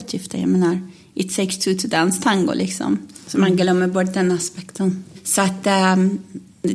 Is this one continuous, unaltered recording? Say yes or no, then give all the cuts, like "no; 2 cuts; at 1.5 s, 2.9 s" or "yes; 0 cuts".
yes; 0 cuts